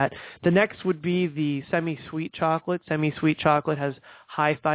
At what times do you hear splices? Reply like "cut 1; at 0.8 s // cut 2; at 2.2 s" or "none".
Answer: none